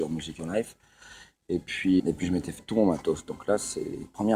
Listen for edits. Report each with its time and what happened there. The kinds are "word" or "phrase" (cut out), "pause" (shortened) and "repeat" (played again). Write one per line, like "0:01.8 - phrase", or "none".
0:02.0 - word
0:02.6 - word